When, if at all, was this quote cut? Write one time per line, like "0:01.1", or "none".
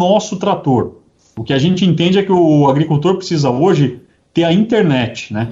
none